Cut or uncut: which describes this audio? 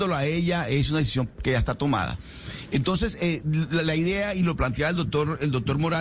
uncut